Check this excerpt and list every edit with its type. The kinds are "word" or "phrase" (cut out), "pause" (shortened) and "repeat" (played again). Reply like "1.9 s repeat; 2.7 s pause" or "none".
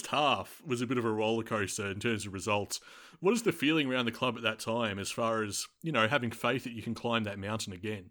none